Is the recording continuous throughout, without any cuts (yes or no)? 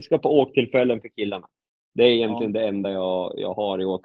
yes